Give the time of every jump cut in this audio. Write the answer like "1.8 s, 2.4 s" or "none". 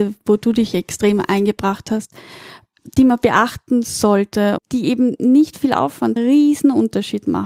4.6 s, 6.2 s